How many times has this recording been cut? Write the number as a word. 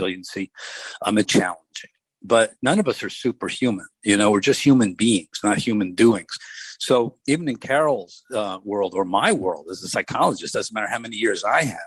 one